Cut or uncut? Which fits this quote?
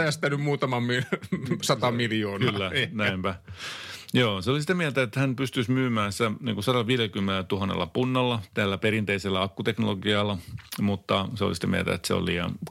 uncut